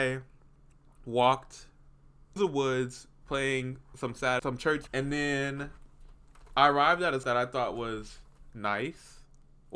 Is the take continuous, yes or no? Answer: no